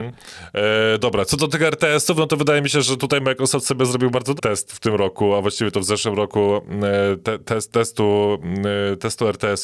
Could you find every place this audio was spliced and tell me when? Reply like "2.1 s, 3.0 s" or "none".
4.4 s